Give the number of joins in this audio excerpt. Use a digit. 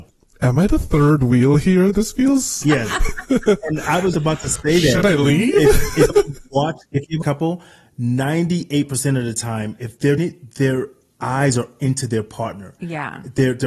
6